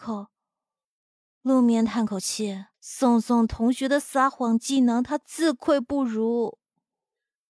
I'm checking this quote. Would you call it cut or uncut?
cut